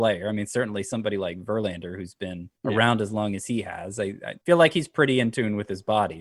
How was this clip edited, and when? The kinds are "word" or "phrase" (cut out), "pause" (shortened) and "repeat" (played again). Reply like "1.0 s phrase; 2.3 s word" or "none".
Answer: 2.6 s pause; 4.4 s pause